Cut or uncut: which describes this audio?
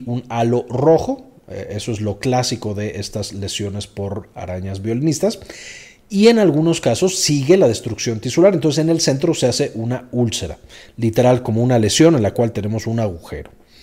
uncut